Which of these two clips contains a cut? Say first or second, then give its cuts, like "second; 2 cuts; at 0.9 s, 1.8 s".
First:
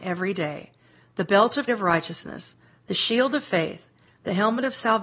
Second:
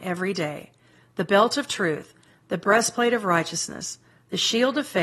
first; 1 cut; at 1.7 s